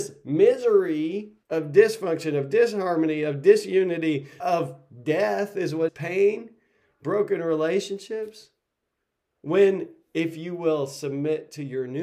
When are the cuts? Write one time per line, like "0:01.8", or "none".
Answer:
0:01.4
0:04.4
0:05.9